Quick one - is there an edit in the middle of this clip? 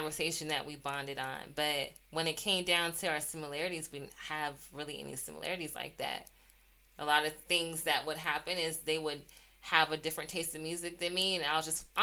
no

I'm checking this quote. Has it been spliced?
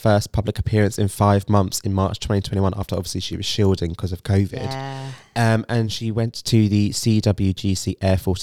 no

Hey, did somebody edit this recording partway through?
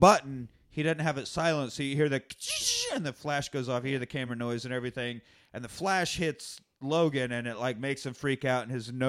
no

